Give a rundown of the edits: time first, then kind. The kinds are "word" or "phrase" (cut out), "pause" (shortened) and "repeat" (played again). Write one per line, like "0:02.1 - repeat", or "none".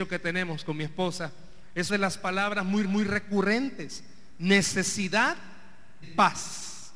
0:01.9 - word
0:02.8 - repeat
0:06.0 - word